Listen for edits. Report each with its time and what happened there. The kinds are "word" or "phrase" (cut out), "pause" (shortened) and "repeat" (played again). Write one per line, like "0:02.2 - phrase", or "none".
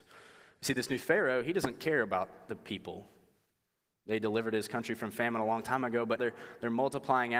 0:06.2 - word